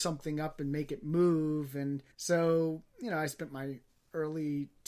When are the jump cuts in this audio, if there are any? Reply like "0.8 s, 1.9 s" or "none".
2.1 s